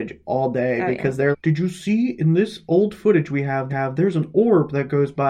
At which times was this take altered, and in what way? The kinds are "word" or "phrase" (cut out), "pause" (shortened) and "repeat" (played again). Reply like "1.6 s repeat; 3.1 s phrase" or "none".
1.3 s word; 3.7 s repeat